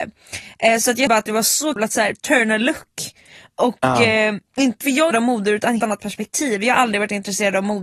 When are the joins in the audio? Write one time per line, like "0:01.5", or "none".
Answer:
0:01.1
0:01.8
0:04.8
0:05.1
0:05.8